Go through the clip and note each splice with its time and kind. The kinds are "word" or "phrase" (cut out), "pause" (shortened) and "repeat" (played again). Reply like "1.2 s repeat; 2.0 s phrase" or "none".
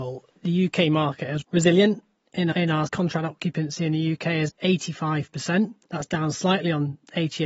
1.4 s word; 2.5 s word; 2.9 s word; 4.5 s word; 5.8 s pause